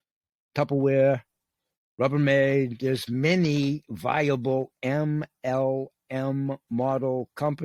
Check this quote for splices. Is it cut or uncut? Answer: uncut